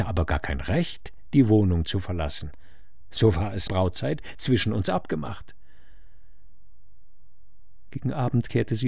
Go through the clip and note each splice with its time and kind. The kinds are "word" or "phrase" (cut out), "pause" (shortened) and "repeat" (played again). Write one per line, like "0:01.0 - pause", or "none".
0:03.7 - phrase